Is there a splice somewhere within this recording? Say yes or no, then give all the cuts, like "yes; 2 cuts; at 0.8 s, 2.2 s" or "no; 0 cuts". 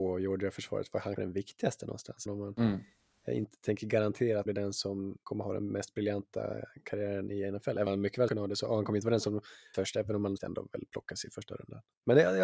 yes; 8 cuts; at 1.2 s, 2.3 s, 4.5 s, 5.2 s, 7.9 s, 8.3 s, 9.7 s, 10.4 s